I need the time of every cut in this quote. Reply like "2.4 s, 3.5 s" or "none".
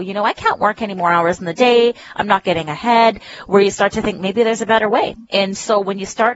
5.3 s